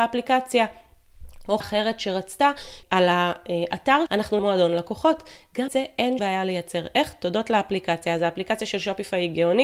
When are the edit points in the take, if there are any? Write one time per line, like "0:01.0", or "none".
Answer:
0:01.6
0:02.8
0:04.1
0:04.4
0:05.7
0:06.2